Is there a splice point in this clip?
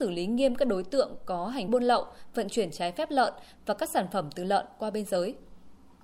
yes; 1 cut; at 1.7 s

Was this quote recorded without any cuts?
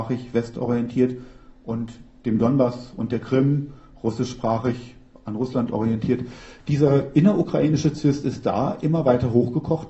yes; 0 cuts

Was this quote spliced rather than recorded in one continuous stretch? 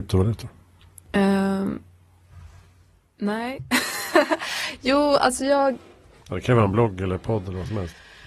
no; 0 cuts

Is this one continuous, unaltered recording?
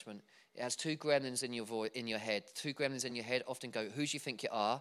yes; 0 cuts

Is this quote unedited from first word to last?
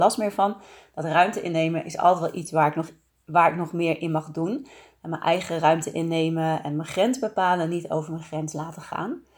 yes; 0 cuts

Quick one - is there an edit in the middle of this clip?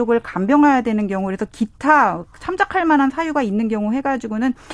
no; 0 cuts

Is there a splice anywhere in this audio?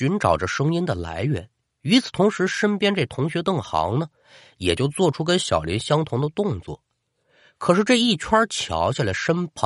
no; 0 cuts

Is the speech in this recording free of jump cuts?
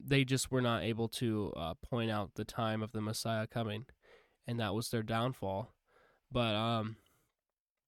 yes; 0 cuts

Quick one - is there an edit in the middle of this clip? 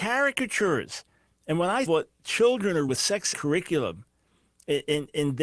yes; 4 cuts; at 1.3 s, 1.9 s, 2.9 s, 3.3 s

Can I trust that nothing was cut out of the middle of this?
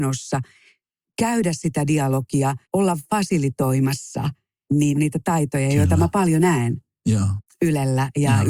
no; 2 cuts; at 2.6 s, 4.9 s

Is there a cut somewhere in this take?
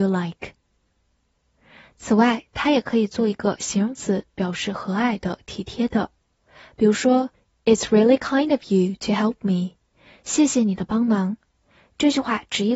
no; 0 cuts

